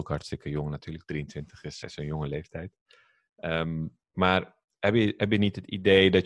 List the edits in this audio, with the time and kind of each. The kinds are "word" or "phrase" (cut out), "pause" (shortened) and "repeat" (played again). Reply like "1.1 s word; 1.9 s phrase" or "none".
1.8 s word; 4.0 s pause